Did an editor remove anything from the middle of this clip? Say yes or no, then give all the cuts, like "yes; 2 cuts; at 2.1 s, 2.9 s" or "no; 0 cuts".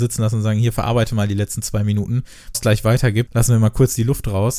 yes; 1 cut; at 2.5 s